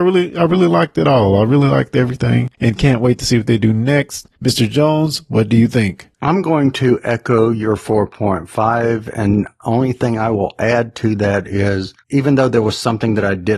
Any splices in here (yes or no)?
yes